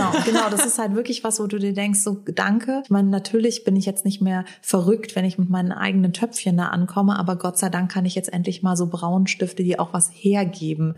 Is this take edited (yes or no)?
no